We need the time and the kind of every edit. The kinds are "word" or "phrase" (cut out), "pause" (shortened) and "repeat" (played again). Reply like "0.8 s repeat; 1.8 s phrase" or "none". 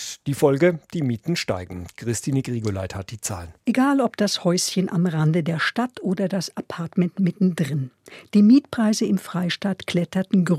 3.6 s pause